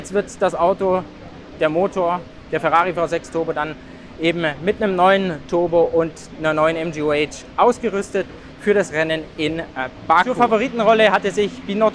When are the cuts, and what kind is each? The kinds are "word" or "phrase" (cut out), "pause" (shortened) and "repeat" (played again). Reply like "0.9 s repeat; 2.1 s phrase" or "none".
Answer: none